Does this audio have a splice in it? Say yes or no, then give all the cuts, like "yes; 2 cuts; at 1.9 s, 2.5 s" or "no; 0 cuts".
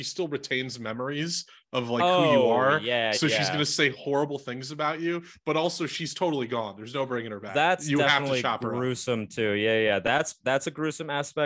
no; 0 cuts